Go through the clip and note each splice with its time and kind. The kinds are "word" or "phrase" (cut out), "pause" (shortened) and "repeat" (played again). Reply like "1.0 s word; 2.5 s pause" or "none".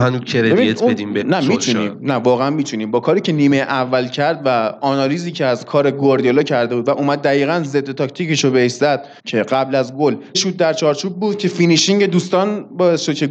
1.2 s word; 9.2 s pause; 10.3 s word